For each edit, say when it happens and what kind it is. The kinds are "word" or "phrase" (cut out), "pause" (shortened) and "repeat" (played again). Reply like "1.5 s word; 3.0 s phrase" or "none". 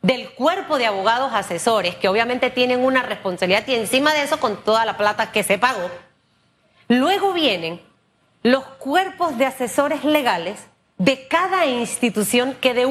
none